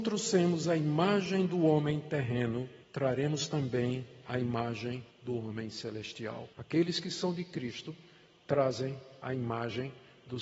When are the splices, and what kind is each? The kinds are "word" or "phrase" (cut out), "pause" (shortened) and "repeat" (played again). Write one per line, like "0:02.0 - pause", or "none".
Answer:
0:02.8 - pause
0:05.1 - pause
0:06.5 - pause